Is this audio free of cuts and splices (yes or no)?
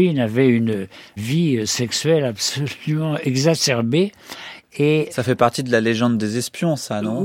no